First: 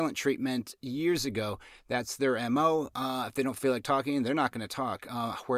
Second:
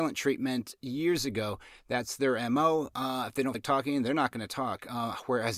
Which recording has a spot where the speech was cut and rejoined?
second; 1 cut; at 3.5 s

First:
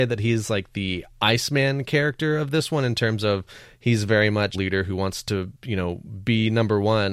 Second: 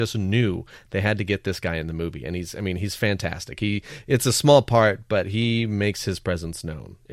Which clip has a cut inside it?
first; 2 cuts; at 1.1 s, 4.5 s

